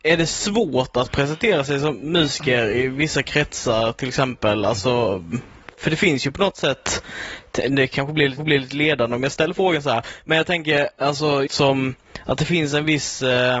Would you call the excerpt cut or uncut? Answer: cut